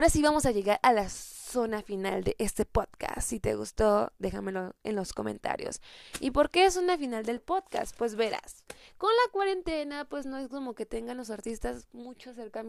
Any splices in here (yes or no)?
no